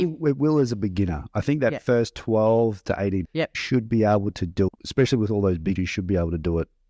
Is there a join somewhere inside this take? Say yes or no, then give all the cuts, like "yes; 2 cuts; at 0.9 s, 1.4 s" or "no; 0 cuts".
yes; 4 cuts; at 3.2 s, 3.5 s, 4.7 s, 5.8 s